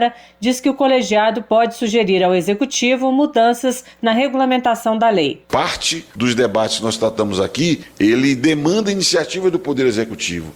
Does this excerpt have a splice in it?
no; 0 cuts

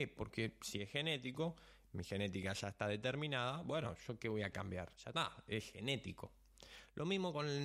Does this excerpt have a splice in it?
no; 0 cuts

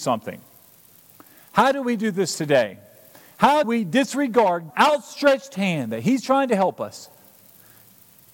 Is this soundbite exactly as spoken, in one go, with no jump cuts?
no; 2 cuts; at 3.6 s, 4.7 s

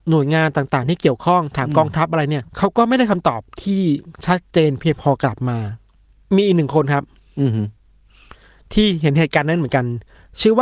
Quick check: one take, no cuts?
no; 1 cut; at 4.1 s

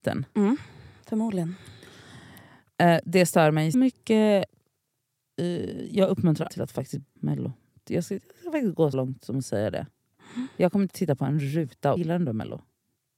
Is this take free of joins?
no; 5 cuts; at 3.7 s, 6.5 s, 7.2 s, 8.9 s, 12.0 s

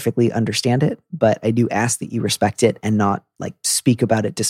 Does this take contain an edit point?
no; 0 cuts

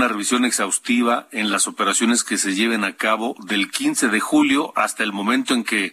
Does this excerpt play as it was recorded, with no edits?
yes; 0 cuts

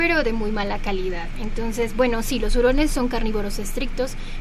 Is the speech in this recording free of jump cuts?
yes; 0 cuts

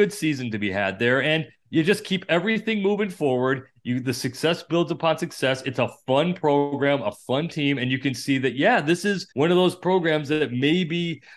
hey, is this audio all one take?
no; 1 cut; at 9.3 s

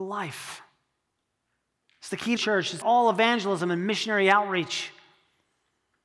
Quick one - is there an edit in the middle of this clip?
yes; 2 cuts; at 2.4 s, 2.8 s

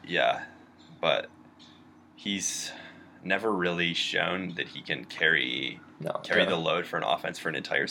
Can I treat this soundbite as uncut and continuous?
yes; 0 cuts

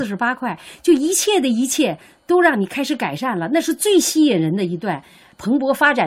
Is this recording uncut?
yes; 0 cuts

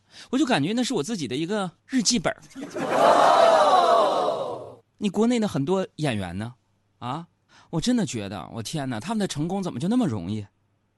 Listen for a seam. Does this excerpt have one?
yes; 3 cuts; at 1.8 s, 4.9 s, 7.5 s

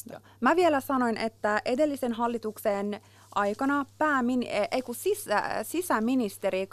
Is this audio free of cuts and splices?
yes; 0 cuts

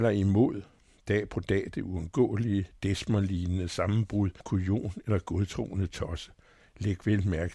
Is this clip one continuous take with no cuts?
no; 1 cut; at 4.4 s

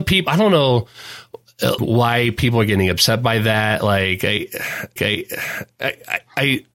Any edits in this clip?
yes; 2 cuts; at 1.8 s, 5.0 s

